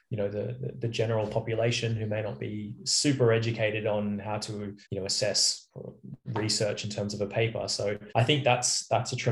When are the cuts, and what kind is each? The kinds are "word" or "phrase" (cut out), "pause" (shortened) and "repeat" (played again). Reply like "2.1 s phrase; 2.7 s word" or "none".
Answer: 4.8 s pause; 8.1 s pause